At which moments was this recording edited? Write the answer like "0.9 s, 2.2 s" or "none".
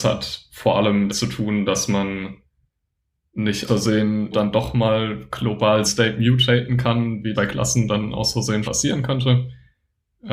1.1 s, 3.7 s, 4.3 s, 5.8 s, 7.3 s, 8.6 s

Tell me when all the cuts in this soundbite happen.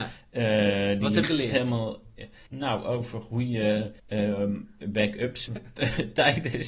1.2 s, 2.5 s, 4.0 s, 5.5 s

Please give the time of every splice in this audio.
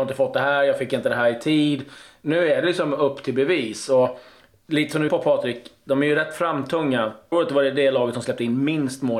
5.1 s, 7.3 s

